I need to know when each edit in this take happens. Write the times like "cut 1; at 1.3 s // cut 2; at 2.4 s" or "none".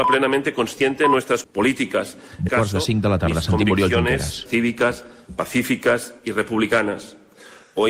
cut 1; at 1.4 s // cut 2; at 2.5 s // cut 3; at 4.5 s